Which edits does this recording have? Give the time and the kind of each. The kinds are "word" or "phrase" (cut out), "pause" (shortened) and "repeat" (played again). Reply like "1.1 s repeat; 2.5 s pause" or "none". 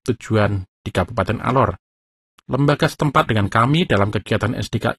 1.9 s pause; 3.3 s phrase